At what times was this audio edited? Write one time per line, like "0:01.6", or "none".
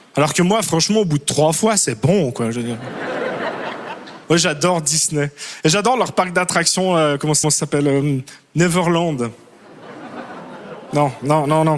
0:04.2
0:07.4